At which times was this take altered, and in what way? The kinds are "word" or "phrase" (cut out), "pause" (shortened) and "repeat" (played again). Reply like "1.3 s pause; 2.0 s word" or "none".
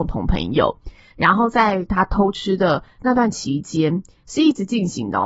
none